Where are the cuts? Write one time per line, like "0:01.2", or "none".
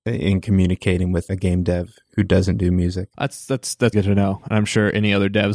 0:01.3
0:03.1
0:03.9